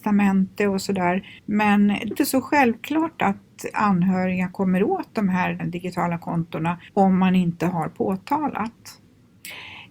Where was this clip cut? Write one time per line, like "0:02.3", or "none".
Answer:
0:01.4
0:02.1
0:03.7
0:05.6
0:06.9